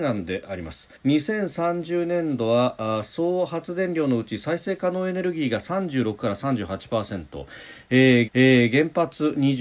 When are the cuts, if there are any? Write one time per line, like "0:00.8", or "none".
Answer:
0:01.0
0:08.3